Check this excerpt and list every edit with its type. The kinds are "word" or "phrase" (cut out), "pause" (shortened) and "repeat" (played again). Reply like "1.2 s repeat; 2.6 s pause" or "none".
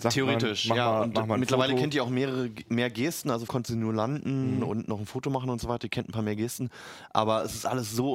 3.5 s word

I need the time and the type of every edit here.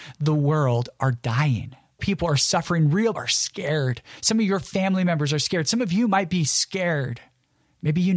2.0 s word; 3.2 s word

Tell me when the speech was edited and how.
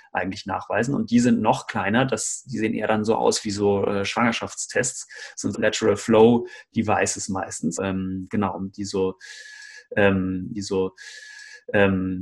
5.5 s word; 7.8 s word; 10.5 s repeat

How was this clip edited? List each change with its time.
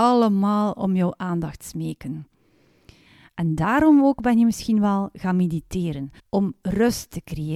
6.2 s pause

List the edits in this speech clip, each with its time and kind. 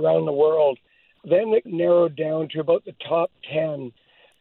1.7 s word

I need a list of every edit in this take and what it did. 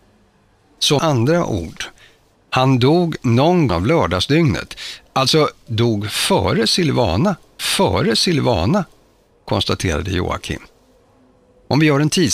1.0 s word; 3.7 s phrase; 5.7 s word; 7.6 s repeat

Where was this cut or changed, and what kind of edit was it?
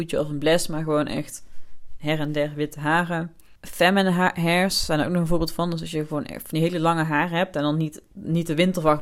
3.6 s pause

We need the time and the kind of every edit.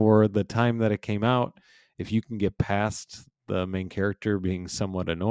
none

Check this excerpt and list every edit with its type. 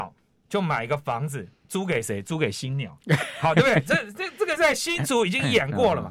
1.6 s pause

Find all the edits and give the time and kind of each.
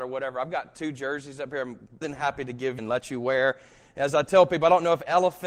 2.0 s word; 2.8 s word

